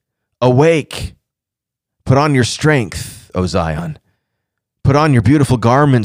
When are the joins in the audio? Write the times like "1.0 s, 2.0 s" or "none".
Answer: none